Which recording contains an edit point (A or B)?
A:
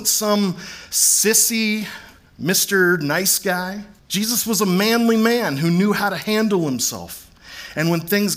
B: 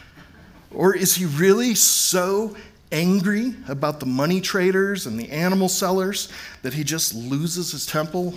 A